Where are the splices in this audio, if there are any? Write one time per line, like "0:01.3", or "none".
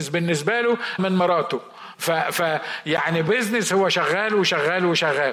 0:01.0
0:03.3